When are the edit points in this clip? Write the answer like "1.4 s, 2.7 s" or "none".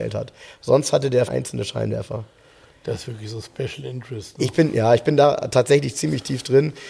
1.3 s